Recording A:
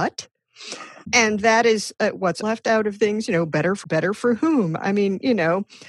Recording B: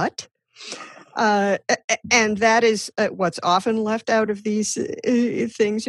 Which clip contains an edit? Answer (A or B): A